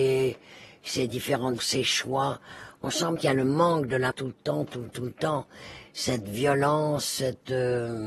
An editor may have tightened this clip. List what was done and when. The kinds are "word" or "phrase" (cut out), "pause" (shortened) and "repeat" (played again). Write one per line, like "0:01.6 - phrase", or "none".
0:01.6 - word
0:03.2 - word
0:04.1 - word
0:04.9 - word